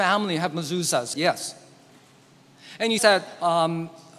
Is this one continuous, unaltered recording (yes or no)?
no